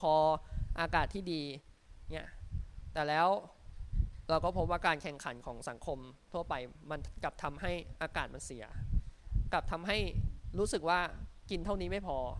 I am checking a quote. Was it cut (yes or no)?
no